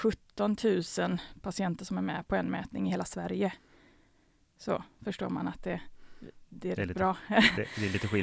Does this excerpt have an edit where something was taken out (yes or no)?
no